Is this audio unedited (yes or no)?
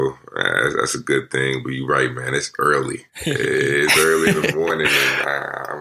no